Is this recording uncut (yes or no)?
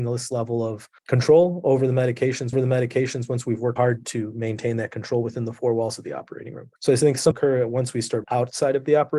no